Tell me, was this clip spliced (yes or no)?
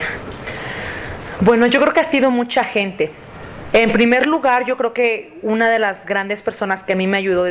no